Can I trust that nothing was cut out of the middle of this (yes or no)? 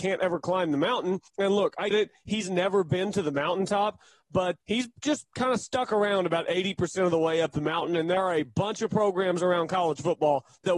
no